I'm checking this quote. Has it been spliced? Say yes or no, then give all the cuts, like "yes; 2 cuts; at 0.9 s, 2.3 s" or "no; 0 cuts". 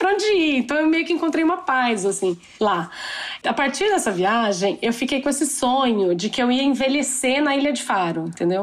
no; 0 cuts